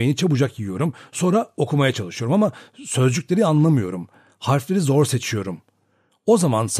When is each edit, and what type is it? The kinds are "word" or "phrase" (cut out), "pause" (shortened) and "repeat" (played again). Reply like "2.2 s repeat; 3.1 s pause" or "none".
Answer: none